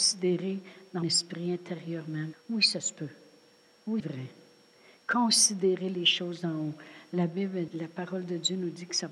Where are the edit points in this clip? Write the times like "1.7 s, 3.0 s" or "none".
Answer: 1.0 s, 2.3 s, 4.0 s, 7.7 s

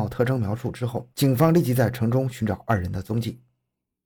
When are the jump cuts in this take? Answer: 1.1 s

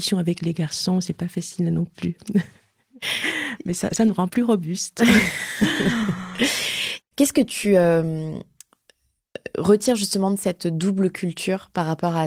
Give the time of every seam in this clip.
4.3 s

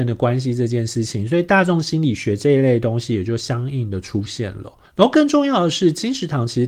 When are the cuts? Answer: 4.8 s

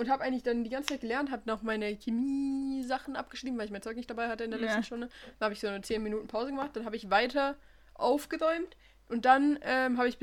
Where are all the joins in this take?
none

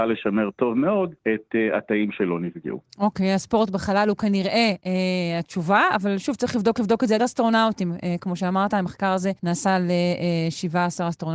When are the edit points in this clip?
1.2 s, 6.8 s, 7.2 s, 9.4 s

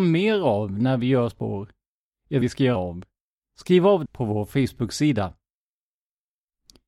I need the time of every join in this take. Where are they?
1.3 s, 2.4 s, 2.8 s, 4.1 s

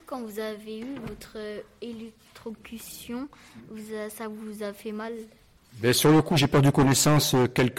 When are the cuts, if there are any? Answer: none

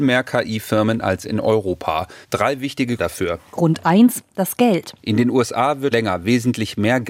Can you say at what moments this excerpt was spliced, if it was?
2.2 s, 3.0 s, 5.9 s

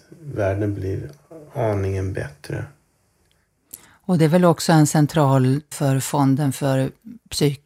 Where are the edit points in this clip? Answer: 5.7 s

